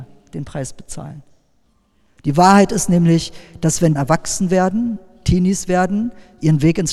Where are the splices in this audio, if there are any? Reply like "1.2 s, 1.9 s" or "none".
4.0 s

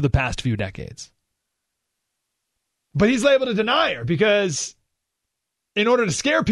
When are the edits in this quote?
none

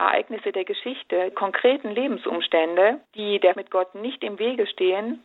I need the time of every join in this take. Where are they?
1.3 s, 3.0 s, 3.5 s

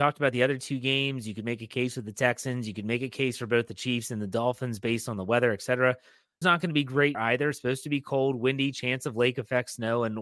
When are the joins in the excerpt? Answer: 6.4 s, 7.1 s

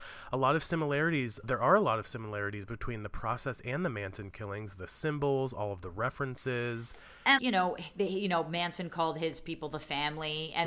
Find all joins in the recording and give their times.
1.4 s, 7.4 s

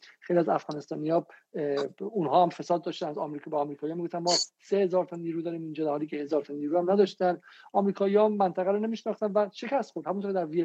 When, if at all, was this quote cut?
none

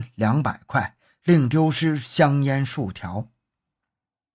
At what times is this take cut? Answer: none

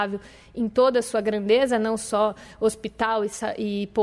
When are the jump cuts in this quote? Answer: none

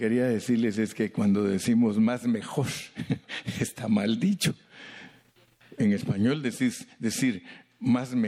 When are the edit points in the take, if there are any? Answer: none

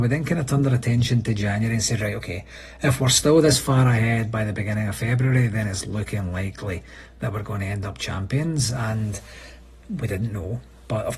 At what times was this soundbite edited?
none

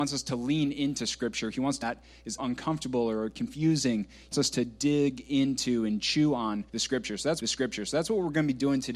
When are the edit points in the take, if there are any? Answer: 1.8 s, 2.4 s, 4.3 s, 6.7 s, 7.4 s

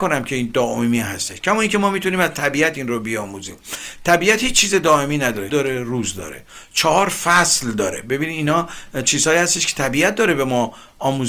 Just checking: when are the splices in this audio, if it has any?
5.5 s

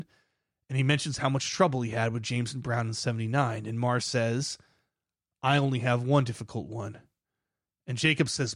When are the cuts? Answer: none

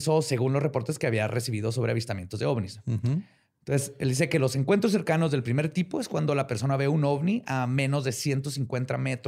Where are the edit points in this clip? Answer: none

